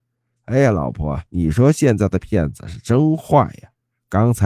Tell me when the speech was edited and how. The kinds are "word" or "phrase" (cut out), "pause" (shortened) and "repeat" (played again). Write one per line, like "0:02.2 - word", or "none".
0:01.3 - pause